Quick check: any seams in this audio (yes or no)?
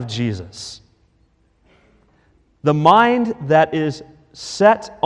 no